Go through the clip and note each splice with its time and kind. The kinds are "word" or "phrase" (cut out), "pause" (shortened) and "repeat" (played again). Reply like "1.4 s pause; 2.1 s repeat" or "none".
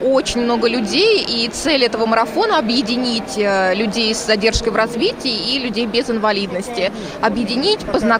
none